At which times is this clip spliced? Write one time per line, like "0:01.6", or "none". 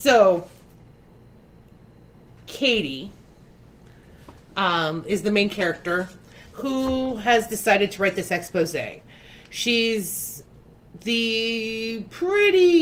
none